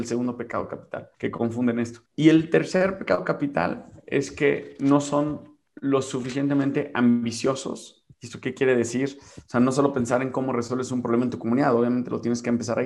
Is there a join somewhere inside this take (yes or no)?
yes